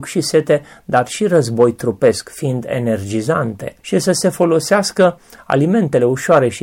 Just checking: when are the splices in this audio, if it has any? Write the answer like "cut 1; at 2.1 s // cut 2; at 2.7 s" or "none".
cut 1; at 3.8 s

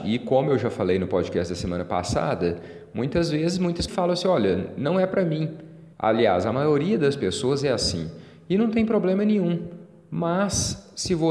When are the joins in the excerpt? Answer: cut 1; at 3.9 s // cut 2; at 5.9 s

